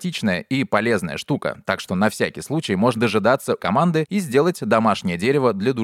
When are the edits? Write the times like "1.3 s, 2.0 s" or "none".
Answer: 2.9 s, 3.6 s